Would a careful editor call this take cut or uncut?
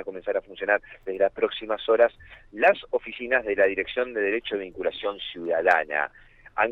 uncut